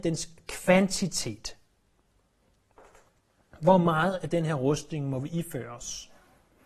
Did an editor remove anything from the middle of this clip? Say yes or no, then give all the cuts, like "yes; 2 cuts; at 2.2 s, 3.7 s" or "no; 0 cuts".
no; 0 cuts